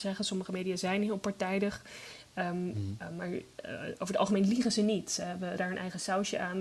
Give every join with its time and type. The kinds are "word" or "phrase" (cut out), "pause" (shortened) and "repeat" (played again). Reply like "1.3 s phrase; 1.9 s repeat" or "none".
5.6 s word